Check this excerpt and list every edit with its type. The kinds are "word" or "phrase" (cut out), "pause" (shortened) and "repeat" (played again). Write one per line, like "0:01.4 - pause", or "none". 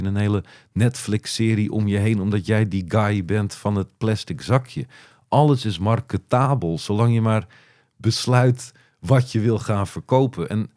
none